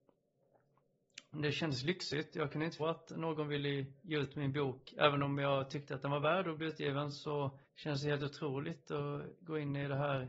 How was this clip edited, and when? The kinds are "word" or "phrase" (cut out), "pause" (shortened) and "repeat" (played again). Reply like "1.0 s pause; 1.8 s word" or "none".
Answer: 2.8 s word; 7.6 s pause